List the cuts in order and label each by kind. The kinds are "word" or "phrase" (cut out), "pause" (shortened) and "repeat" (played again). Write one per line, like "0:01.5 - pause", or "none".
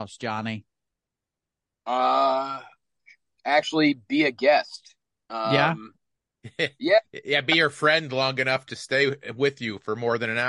none